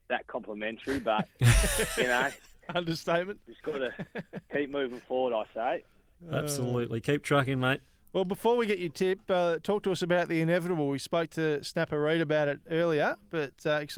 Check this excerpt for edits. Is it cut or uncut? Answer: uncut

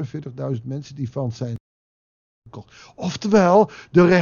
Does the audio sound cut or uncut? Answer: uncut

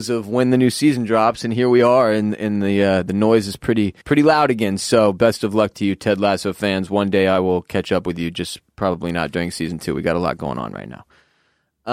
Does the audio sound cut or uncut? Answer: cut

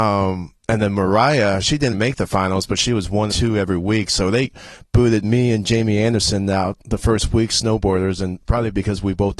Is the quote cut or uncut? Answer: cut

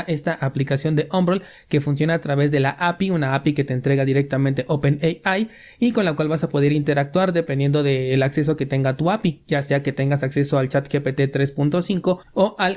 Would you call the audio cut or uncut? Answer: uncut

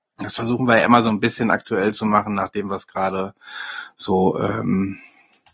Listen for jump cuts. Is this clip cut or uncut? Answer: uncut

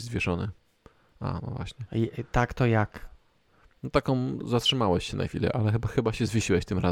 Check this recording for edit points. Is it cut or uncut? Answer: uncut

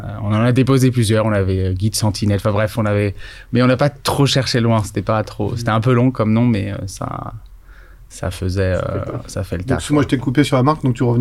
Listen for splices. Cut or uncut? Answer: uncut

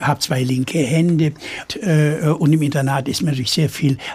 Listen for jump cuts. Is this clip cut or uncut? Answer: cut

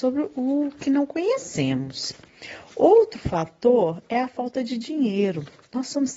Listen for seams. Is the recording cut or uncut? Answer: uncut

